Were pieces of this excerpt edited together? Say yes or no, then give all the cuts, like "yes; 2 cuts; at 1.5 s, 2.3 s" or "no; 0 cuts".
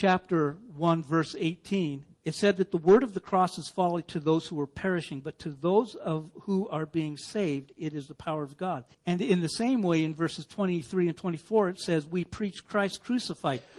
yes; 2 cuts; at 2.1 s, 8.9 s